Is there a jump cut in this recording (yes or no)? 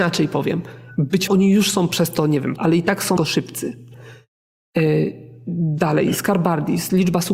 yes